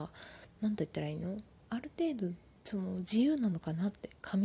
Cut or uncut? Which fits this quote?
uncut